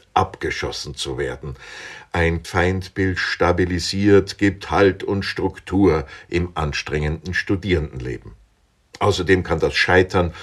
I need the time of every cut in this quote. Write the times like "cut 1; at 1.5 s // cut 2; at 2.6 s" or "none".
cut 1; at 2.4 s